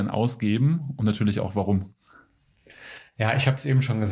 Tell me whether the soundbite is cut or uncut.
uncut